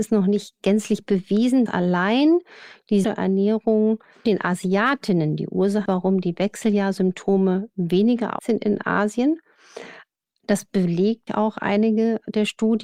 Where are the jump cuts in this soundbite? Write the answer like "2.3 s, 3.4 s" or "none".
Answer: 1.7 s, 3.0 s, 4.3 s, 5.9 s, 8.4 s, 11.3 s